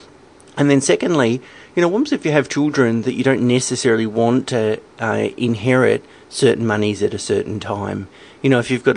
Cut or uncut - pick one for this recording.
uncut